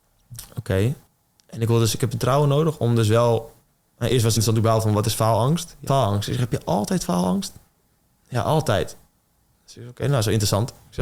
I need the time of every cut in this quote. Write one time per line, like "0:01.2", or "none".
0:01.1
0:02.1
0:04.4
0:05.9

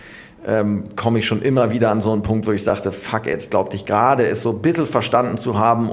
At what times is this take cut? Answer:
none

